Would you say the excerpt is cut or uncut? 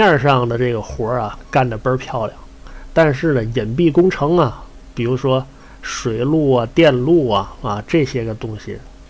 uncut